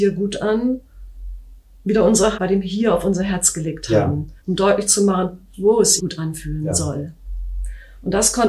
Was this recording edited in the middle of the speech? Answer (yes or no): yes